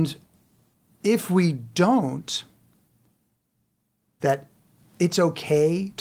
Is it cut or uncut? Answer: cut